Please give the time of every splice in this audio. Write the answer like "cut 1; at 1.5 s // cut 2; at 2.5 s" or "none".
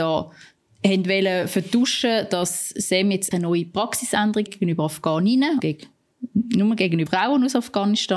cut 1; at 3.3 s // cut 2; at 4.5 s // cut 3; at 5.6 s // cut 4; at 7.1 s